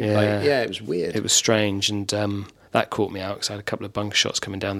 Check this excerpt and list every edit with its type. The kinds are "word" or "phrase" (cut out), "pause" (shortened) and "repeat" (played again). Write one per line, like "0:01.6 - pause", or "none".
none

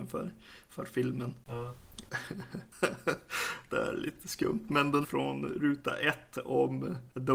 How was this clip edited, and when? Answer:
0:05.0 - phrase

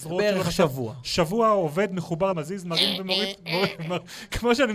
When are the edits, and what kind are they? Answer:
0:02.3 - word

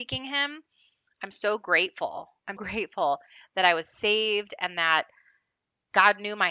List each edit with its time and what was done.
0:02.6 - word

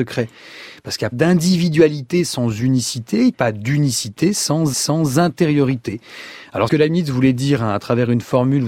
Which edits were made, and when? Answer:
0:01.1 - word
0:03.3 - phrase
0:04.7 - repeat
0:06.7 - phrase

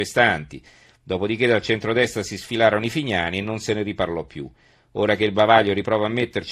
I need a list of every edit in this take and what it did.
none

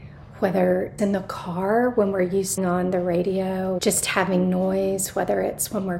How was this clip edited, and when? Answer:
0:01.0 - word
0:02.6 - phrase
0:03.8 - word

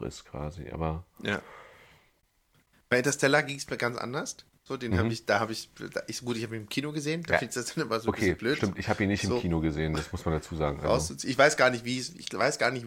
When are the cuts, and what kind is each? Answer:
none

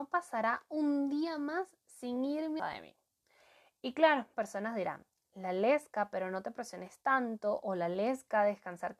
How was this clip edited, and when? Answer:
0:02.6 - phrase
0:04.3 - word

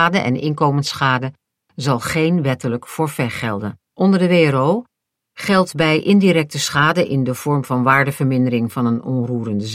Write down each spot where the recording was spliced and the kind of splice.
0:03.8 - pause

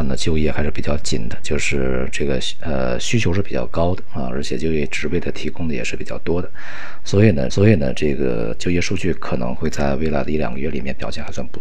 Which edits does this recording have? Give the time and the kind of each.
0:07.5 - repeat

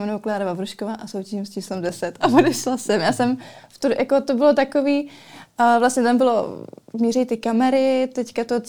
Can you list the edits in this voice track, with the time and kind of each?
none

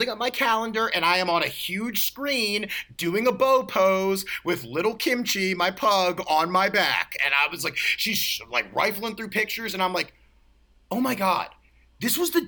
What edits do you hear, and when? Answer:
none

